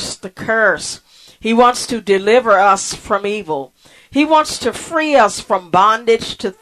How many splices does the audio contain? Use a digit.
0